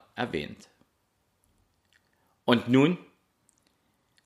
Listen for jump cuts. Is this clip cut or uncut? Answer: uncut